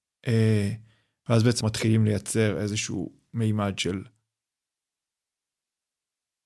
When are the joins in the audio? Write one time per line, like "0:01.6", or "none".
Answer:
0:01.6